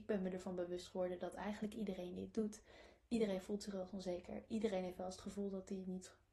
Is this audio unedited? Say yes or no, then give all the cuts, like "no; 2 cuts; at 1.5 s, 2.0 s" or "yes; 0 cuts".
yes; 0 cuts